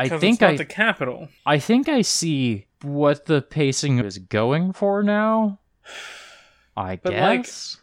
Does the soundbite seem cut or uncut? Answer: cut